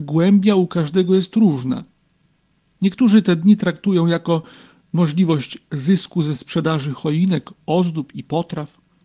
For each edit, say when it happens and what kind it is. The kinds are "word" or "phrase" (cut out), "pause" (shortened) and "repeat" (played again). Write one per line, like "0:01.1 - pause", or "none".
none